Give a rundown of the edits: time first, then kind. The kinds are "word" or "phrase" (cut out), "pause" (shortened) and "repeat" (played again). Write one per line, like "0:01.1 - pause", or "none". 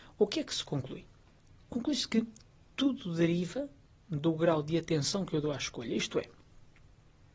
none